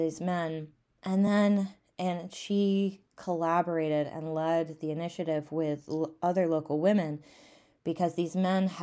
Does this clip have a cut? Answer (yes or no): no